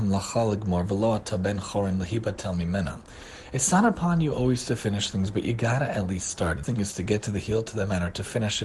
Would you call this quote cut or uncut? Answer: cut